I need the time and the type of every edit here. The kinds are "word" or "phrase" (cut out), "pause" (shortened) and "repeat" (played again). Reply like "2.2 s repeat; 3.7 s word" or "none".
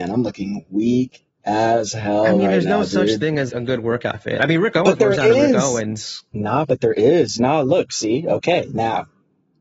1.3 s pause; 3.5 s word; 6.3 s pause